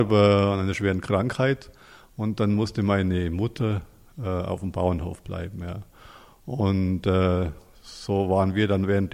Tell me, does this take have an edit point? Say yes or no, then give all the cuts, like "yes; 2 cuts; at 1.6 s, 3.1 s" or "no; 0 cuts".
no; 0 cuts